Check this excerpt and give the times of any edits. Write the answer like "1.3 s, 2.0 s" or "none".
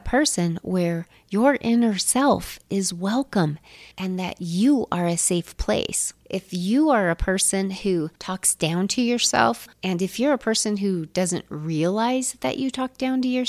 3.9 s, 6.2 s, 8.2 s

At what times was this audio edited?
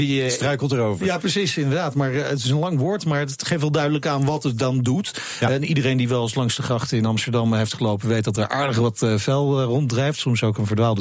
none

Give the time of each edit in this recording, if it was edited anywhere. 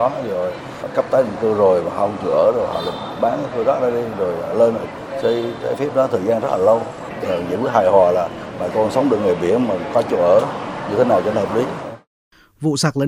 7.2 s

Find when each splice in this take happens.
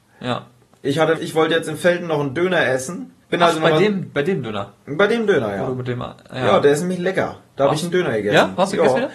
1.2 s, 3.2 s

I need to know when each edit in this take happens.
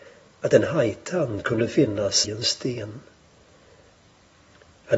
2.2 s

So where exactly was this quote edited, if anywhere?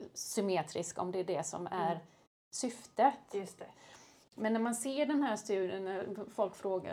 none

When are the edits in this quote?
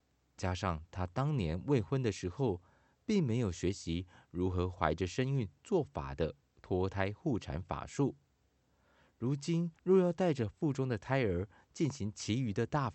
9.8 s

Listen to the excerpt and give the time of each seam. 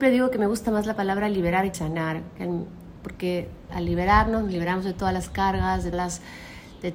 1.7 s, 3.7 s, 5.9 s

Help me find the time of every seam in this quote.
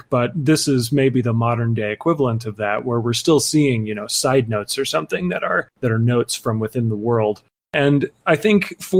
none

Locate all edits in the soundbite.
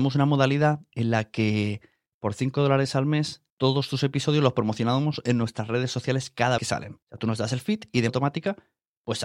3.5 s, 6.6 s, 7.0 s, 8.1 s

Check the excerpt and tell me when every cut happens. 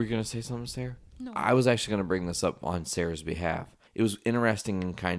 3.9 s

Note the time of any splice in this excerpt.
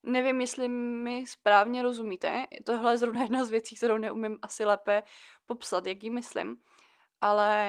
none

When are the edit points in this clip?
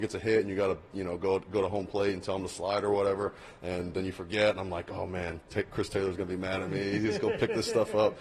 none

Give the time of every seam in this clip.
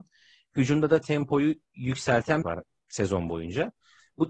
2.4 s

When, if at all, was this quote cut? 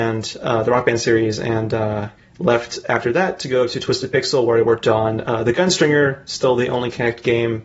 2.2 s

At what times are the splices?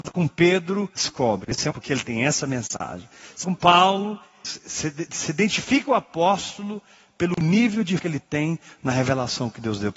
1.0 s, 1.7 s, 3.4 s, 4.4 s, 8.0 s

